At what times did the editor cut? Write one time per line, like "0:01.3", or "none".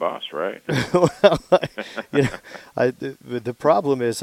none